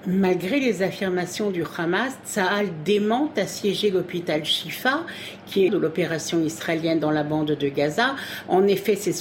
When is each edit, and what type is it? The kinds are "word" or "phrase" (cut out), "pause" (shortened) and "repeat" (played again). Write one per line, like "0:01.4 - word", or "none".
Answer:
0:05.7 - phrase